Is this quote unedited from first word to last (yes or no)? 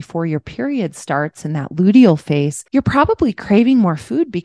no